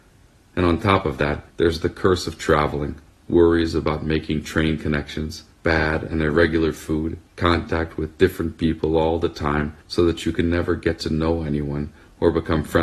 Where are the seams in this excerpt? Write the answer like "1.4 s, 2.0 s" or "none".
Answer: 1.5 s, 3.1 s, 5.5 s, 7.3 s, 9.8 s